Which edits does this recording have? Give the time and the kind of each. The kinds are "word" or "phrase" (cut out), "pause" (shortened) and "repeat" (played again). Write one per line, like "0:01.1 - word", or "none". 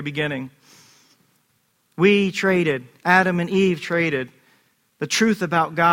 none